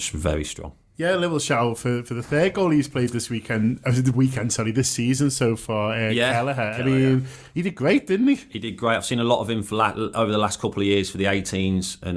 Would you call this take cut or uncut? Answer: uncut